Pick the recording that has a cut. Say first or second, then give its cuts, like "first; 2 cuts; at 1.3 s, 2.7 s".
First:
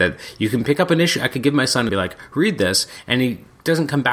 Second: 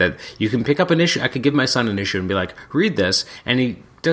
first; 1 cut; at 1.9 s